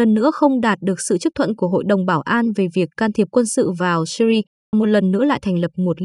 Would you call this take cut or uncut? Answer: cut